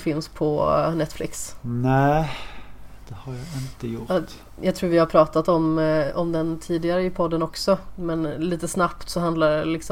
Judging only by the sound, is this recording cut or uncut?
uncut